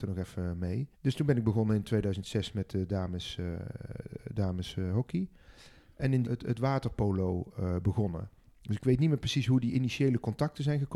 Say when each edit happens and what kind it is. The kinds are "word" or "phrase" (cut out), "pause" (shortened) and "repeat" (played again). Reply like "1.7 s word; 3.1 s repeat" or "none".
0.9 s pause; 6.2 s phrase